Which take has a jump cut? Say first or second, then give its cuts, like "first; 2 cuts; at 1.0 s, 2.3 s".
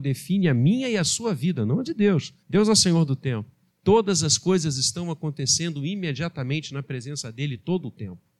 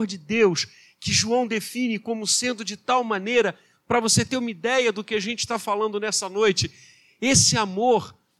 first; 2 cuts; at 2.4 s, 3.7 s